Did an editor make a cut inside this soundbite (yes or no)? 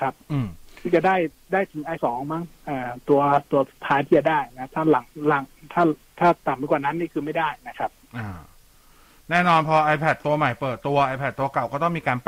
yes